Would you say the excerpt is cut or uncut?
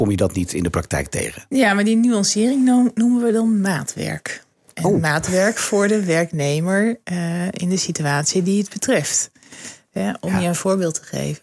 uncut